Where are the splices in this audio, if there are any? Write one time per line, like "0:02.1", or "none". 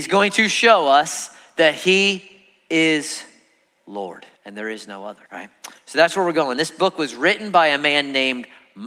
0:04.4
0:05.3